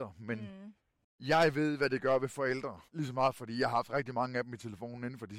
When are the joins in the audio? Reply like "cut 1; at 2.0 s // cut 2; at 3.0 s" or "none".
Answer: cut 1; at 2.9 s